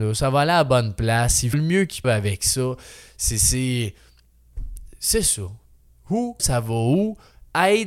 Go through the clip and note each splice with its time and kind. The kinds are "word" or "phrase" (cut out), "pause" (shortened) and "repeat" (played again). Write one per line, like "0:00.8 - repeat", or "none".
0:01.5 - word
0:02.0 - word
0:06.4 - word